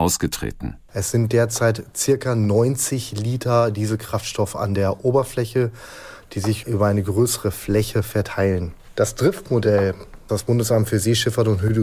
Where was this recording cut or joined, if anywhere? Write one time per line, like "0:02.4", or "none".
0:10.3